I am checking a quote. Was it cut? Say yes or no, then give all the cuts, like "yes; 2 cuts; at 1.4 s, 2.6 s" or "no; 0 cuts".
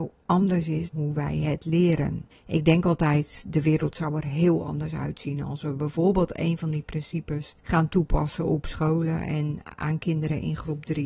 yes; 3 cuts; at 0.9 s, 2.3 s, 7.6 s